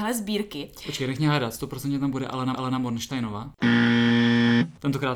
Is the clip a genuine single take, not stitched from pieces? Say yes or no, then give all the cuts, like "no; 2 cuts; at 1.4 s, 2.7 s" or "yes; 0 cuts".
no; 1 cut; at 2.5 s